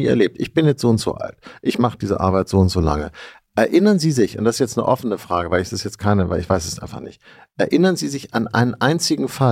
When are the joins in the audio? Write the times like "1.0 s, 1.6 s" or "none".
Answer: none